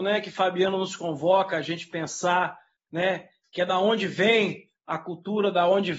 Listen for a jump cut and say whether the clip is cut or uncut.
uncut